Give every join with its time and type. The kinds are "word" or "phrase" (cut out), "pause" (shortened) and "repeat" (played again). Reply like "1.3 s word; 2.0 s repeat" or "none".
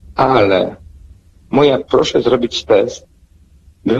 1.8 s word